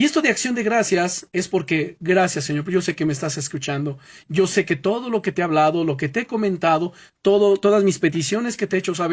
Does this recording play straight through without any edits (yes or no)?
yes